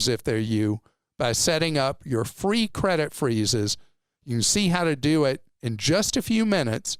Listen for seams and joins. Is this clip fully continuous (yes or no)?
yes